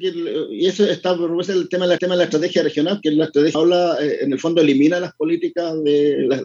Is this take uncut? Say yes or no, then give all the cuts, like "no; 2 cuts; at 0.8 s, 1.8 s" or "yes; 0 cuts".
no; 3 cuts; at 2.0 s, 3.0 s, 3.5 s